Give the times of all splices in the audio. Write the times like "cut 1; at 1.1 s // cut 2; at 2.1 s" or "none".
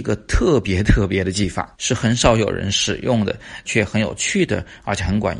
cut 1; at 1.7 s // cut 2; at 3.6 s